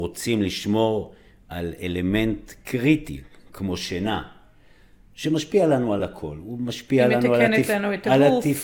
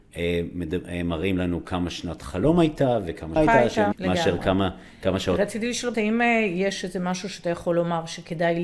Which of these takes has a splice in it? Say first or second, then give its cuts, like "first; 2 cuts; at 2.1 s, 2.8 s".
second; 3 cuts; at 3.4 s, 3.9 s, 5.9 s